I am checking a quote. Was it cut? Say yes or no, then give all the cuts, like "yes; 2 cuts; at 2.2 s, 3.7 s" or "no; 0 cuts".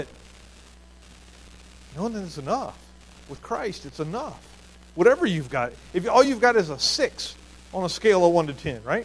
no; 0 cuts